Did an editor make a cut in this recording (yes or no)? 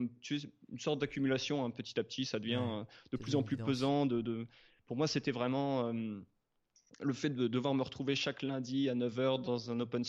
no